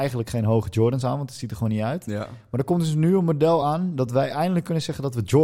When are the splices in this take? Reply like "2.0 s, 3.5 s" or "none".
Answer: none